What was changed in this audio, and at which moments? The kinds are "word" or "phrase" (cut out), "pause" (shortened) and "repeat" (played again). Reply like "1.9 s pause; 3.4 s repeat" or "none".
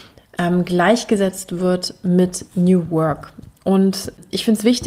none